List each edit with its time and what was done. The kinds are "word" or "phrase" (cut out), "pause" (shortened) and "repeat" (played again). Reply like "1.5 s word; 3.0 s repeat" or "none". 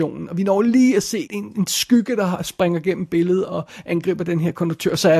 1.3 s word